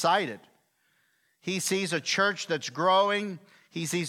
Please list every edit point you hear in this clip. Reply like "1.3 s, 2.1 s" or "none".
none